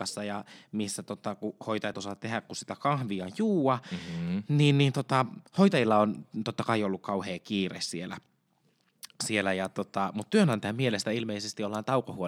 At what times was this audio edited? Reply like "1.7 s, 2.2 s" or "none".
1.9 s, 5.5 s